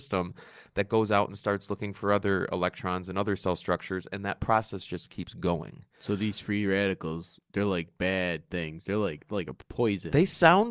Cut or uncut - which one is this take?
uncut